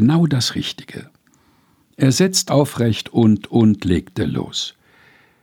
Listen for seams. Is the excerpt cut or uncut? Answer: cut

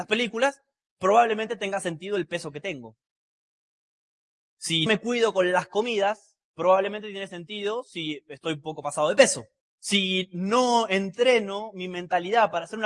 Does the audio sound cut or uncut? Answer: cut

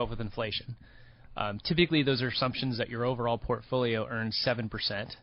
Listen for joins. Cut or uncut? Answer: uncut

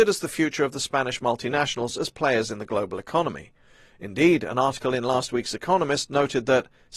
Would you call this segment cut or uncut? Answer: uncut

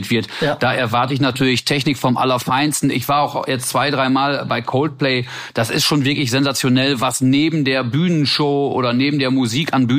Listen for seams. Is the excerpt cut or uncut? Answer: uncut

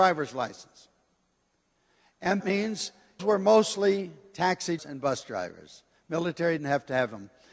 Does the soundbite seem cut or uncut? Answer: cut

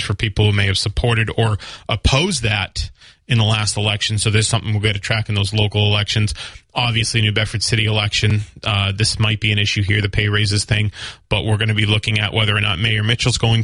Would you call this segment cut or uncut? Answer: uncut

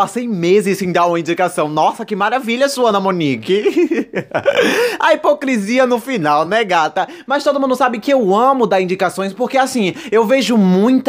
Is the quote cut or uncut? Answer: uncut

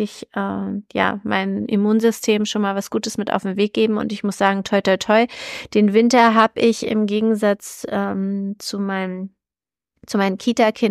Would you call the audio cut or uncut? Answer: uncut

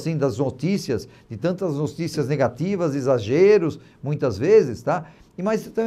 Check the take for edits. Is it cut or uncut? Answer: uncut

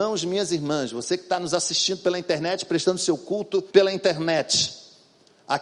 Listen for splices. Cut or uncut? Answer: cut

